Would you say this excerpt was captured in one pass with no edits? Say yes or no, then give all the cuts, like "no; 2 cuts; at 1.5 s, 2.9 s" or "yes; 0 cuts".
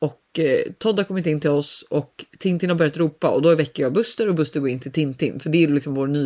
yes; 0 cuts